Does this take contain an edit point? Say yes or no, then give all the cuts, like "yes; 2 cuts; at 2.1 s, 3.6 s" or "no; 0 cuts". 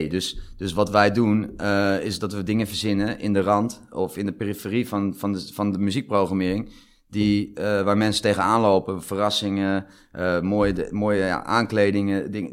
no; 0 cuts